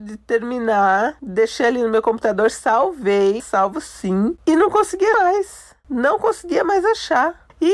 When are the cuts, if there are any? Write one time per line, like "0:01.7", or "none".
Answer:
0:03.4
0:05.1